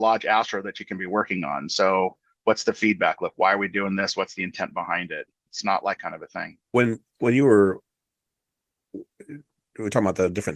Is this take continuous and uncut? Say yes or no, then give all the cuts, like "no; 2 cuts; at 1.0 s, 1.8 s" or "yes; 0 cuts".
no; 3 cuts; at 5.5 s, 6.0 s, 6.6 s